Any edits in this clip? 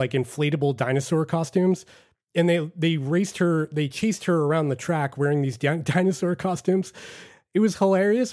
no; 0 cuts

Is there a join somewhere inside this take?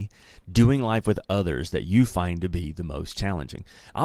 no; 0 cuts

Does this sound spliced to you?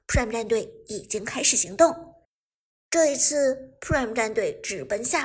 yes; 1 cut; at 2.5 s

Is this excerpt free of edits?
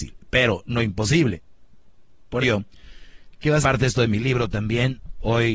no; 2 cuts; at 2.4 s, 3.6 s

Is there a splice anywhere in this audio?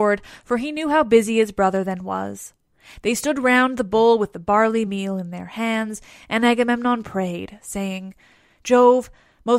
no; 0 cuts

